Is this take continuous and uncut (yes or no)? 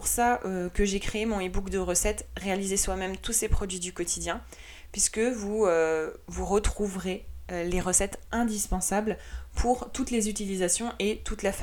yes